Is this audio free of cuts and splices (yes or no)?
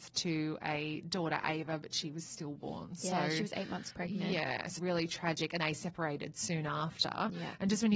no